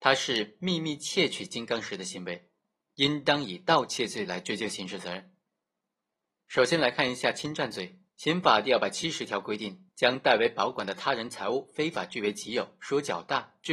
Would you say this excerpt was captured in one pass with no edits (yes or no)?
no